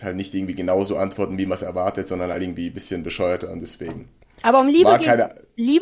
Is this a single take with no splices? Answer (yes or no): yes